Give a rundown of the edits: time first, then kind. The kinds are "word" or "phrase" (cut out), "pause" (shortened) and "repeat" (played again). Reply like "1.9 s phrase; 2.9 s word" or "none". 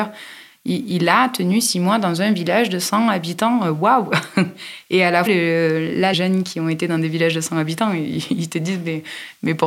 5.3 s word; 6.1 s word